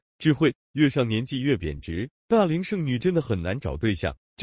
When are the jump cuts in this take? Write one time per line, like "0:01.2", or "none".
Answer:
0:02.2